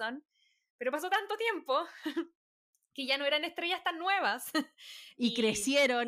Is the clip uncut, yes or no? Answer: yes